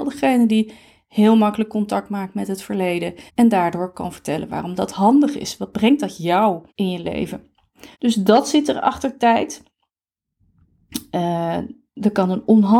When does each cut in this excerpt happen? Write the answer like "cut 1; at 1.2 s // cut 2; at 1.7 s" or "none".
cut 1; at 3.3 s // cut 2; at 6.7 s // cut 3; at 7.9 s // cut 4; at 11.9 s